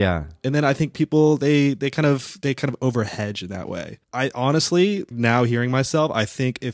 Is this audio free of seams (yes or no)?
no